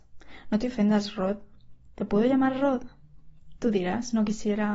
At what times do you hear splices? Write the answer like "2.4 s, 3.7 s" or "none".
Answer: none